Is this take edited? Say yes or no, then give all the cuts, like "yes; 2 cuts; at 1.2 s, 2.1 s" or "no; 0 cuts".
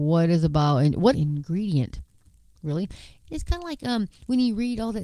yes; 1 cut; at 1.1 s